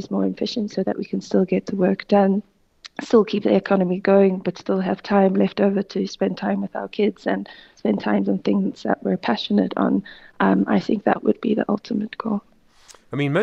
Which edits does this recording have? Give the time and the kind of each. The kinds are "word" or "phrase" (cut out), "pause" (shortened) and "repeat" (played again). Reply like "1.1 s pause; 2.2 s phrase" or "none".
none